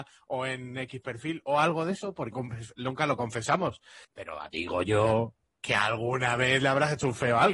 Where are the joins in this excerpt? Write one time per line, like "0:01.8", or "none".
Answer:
0:02.3
0:04.0